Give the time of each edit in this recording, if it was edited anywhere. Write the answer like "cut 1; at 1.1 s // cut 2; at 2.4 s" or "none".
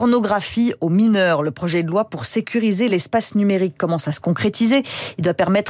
none